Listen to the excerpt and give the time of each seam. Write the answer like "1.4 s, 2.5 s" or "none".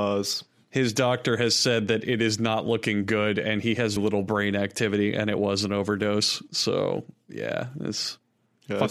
4.0 s